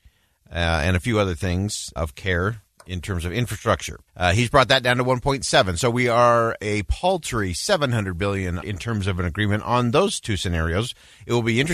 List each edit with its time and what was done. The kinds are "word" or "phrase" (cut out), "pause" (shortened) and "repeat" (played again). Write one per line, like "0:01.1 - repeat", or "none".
0:02.0 - word
0:04.1 - pause
0:08.6 - word